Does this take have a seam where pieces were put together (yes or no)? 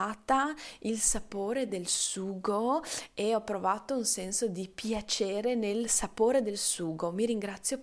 no